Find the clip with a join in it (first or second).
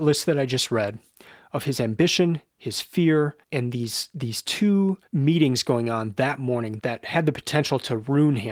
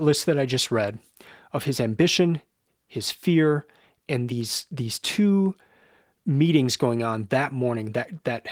first